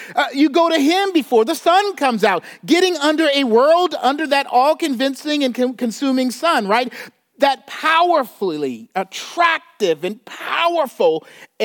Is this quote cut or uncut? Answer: uncut